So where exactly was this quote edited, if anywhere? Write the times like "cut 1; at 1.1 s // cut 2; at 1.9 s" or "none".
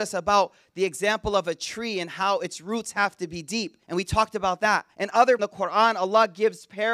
cut 1; at 3.8 s // cut 2; at 4.9 s // cut 3; at 5.4 s